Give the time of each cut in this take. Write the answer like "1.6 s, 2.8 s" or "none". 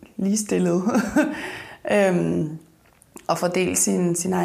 none